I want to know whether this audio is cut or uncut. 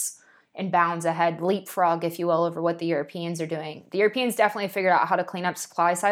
uncut